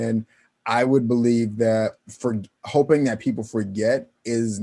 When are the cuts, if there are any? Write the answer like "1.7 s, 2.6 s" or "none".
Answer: 2.5 s